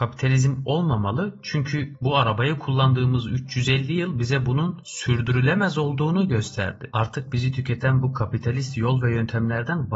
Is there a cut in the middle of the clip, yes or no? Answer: no